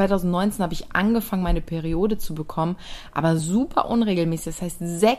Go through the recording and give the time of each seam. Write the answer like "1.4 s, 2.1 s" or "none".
none